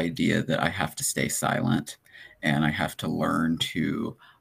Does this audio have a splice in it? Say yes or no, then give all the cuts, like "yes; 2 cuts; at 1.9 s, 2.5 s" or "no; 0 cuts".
no; 0 cuts